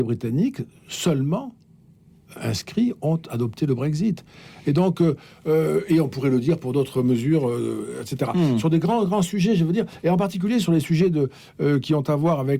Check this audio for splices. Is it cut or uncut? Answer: uncut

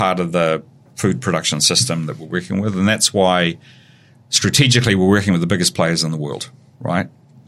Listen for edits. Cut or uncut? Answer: uncut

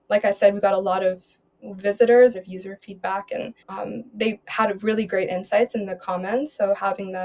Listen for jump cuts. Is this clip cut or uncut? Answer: cut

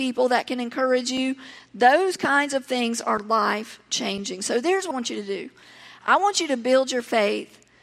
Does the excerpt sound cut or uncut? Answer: cut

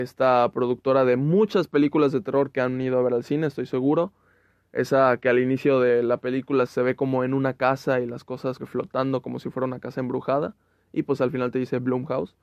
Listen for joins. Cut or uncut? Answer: cut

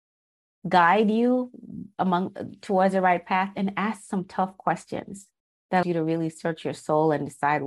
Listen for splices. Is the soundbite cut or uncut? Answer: cut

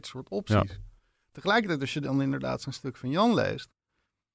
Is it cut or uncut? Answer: uncut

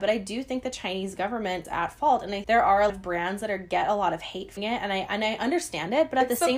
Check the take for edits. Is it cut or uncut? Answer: cut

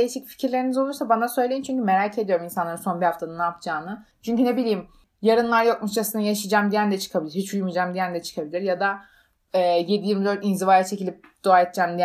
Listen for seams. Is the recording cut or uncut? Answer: uncut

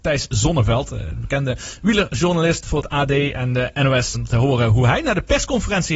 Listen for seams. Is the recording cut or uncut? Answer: cut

